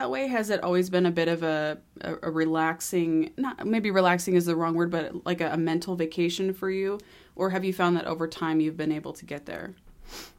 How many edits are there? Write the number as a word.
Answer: zero